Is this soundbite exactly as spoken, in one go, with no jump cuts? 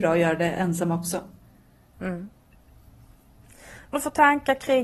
no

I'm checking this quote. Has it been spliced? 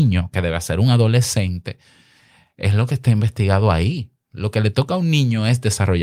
no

